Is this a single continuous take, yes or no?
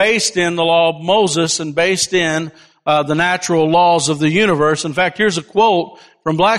yes